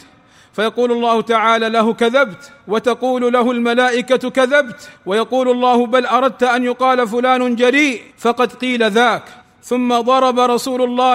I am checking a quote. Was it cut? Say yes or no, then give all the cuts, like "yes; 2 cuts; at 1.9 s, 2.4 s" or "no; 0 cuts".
yes; 4 cuts; at 2.6 s, 5.0 s, 8.1 s, 9.4 s